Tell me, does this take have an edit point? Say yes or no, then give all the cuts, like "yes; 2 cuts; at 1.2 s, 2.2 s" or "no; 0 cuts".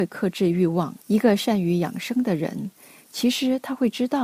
yes; 1 cut; at 1.0 s